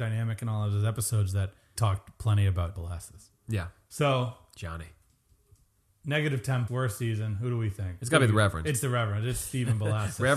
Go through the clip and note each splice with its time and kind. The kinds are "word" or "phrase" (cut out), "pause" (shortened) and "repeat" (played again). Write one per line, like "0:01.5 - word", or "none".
0:01.8 - word
0:02.8 - word
0:06.7 - word